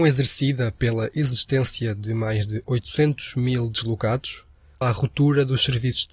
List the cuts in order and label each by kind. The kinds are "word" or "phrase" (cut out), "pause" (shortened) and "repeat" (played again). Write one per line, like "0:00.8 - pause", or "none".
0:04.8 - word